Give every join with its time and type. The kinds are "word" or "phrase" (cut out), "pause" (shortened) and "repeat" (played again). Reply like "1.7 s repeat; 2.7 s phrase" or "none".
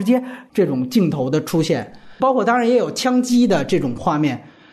2.2 s word

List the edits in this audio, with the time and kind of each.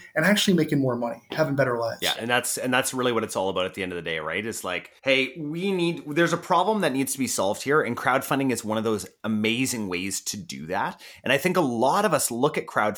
5.0 s pause

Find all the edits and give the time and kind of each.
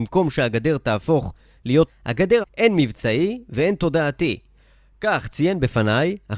1.9 s phrase; 2.4 s phrase

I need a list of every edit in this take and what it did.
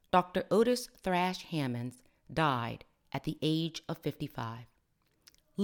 none

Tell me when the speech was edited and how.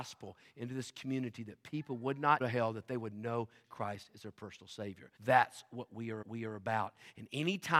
2.4 s phrase; 3.6 s word; 5.2 s pause; 6.2 s repeat

